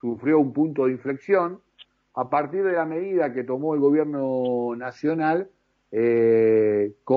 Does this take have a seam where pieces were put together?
no; 0 cuts

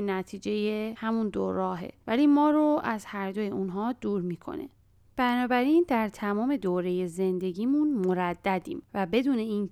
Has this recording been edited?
no; 0 cuts

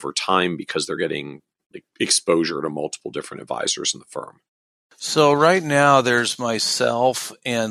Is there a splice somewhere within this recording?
no; 0 cuts

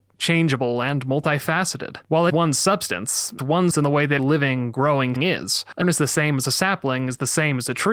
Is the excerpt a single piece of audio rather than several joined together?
no; 6 cuts; at 2.3 s, 3.4 s, 3.7 s, 4.2 s, 5.2 s, 5.8 s

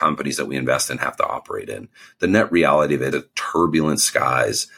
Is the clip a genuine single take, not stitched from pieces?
no; 1 cut; at 3.1 s

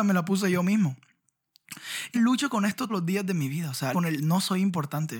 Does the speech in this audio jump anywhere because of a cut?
yes; 3 cuts; at 2.1 s, 2.9 s, 3.9 s

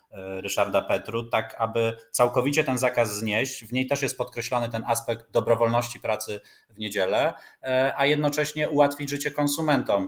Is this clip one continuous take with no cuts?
yes; 0 cuts

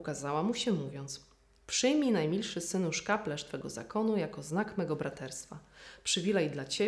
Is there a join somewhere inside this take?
no; 0 cuts

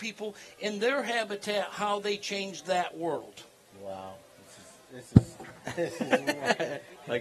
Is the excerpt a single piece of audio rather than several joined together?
yes; 0 cuts

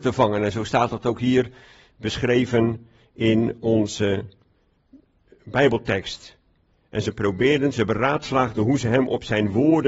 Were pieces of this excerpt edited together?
no; 0 cuts

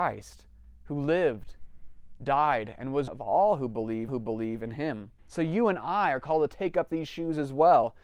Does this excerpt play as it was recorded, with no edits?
no; 3 cuts; at 3.1 s, 4.1 s, 5.2 s

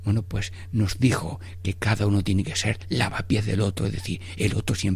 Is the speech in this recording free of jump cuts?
yes; 0 cuts

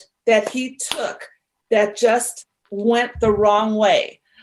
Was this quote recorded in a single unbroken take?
yes; 0 cuts

